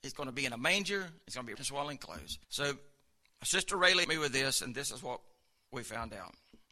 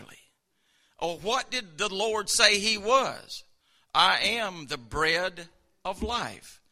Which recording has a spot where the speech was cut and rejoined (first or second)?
first